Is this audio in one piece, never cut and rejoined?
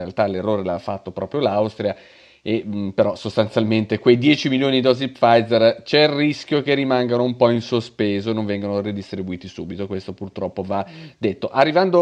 yes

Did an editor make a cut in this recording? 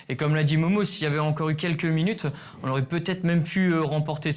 no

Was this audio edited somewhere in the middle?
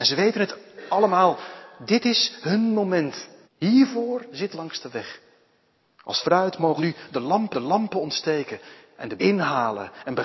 yes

